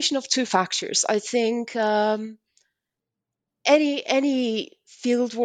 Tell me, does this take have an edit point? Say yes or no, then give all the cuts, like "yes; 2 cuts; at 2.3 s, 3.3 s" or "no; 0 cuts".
no; 0 cuts